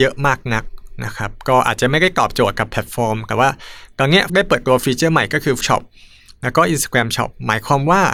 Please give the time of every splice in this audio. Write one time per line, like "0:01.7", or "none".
0:04.3
0:05.6